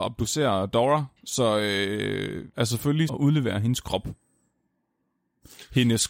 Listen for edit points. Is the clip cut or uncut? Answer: cut